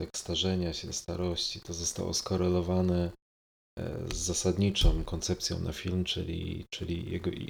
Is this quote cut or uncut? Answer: uncut